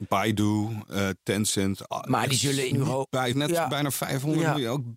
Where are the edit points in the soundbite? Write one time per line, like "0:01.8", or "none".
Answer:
0:02.7
0:03.3